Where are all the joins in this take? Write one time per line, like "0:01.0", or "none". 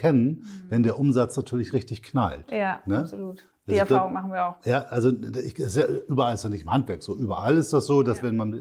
0:03.5